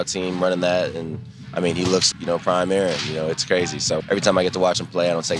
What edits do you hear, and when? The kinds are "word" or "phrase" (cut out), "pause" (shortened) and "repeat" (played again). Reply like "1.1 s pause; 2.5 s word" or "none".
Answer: 2.1 s word; 4.0 s word